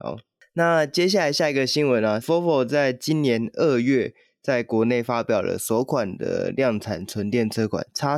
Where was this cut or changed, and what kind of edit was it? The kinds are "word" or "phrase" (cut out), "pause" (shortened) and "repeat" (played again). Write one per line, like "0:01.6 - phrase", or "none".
0:02.2 - word